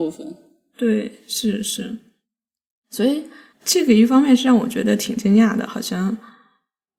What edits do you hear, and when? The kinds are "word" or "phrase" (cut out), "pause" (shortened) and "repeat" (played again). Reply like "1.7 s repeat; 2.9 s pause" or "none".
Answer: none